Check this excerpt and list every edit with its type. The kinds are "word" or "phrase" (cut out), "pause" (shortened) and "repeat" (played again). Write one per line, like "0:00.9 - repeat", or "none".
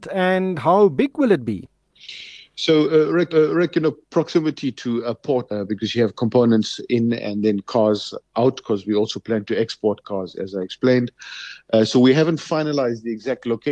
0:03.3 - repeat
0:05.5 - phrase